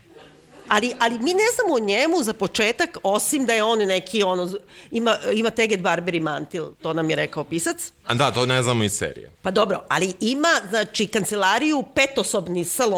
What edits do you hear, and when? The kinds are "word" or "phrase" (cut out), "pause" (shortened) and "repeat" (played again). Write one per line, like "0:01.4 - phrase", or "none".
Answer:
0:06.7 - pause
0:09.3 - pause